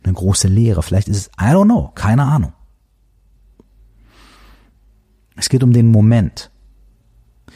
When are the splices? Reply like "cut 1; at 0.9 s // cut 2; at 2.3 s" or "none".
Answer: none